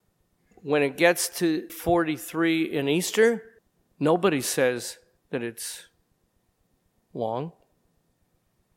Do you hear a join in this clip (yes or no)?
yes